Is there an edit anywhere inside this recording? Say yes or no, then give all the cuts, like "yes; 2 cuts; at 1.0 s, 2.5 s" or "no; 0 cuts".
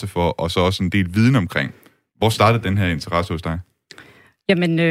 no; 0 cuts